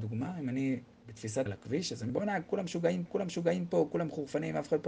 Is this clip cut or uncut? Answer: cut